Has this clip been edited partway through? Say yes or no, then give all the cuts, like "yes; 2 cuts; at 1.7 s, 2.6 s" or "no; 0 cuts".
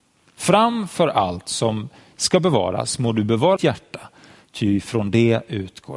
yes; 1 cut; at 3.6 s